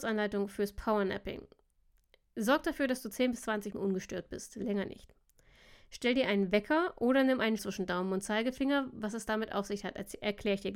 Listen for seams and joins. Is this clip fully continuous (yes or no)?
no